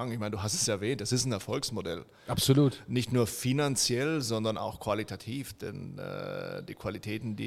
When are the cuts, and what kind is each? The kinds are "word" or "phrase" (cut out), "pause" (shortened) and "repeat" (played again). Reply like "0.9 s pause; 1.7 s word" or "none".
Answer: none